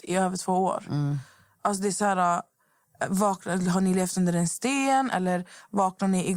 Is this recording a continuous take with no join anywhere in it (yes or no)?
yes